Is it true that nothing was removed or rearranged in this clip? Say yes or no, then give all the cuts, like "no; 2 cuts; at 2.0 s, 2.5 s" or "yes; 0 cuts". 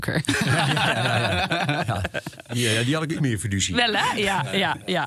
no; 1 cut; at 3.2 s